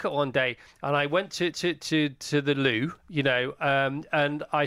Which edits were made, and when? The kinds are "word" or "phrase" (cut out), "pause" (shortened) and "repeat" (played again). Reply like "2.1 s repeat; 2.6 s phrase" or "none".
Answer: 1.5 s repeat; 3.0 s pause